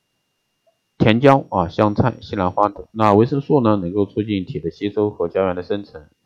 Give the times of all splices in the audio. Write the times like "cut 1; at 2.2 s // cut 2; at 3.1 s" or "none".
cut 1; at 2.9 s